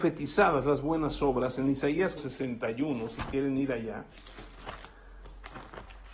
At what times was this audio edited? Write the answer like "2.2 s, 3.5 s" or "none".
2.2 s